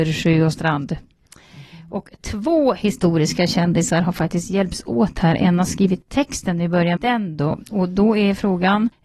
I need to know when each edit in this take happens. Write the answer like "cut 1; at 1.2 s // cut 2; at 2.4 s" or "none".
cut 1; at 7.0 s